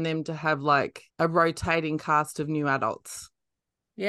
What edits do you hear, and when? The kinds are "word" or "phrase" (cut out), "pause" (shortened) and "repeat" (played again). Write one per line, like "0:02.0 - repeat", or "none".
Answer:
0:01.1 - pause